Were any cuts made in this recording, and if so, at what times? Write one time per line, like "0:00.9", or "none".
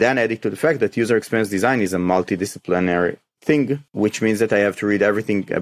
0:03.9